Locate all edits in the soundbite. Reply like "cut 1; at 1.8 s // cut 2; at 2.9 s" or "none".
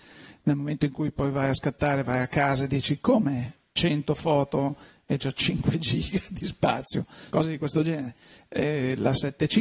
cut 1; at 7.3 s